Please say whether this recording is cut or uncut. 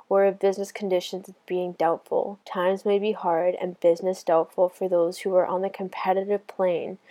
cut